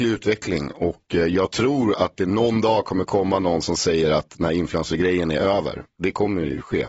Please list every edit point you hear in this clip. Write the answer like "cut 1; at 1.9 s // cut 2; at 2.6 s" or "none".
none